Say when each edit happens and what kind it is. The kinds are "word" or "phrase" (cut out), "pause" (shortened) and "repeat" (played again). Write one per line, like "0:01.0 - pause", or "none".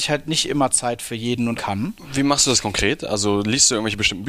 0:01.6 - phrase
0:02.6 - word